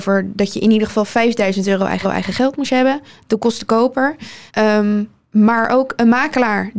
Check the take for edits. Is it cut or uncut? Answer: cut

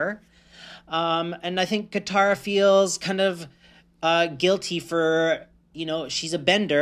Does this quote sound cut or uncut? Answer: uncut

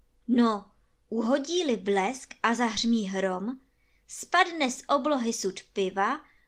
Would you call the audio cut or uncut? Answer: uncut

